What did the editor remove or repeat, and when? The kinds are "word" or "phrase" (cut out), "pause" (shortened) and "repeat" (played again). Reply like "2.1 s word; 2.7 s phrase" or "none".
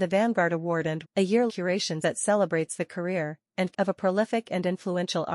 1.0 s word; 1.5 s word; 2.0 s word; 3.7 s word